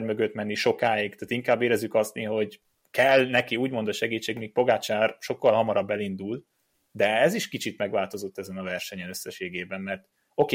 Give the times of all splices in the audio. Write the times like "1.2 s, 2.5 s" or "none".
none